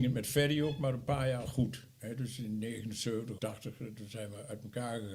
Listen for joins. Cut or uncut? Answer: cut